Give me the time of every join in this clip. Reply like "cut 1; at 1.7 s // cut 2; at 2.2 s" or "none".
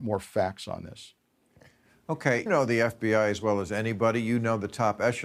cut 1; at 2.5 s